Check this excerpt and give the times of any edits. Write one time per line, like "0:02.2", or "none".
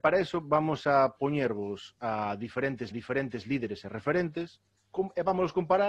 0:02.9
0:04.7